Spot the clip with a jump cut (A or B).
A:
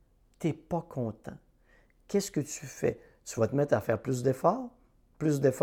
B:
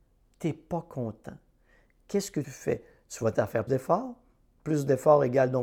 B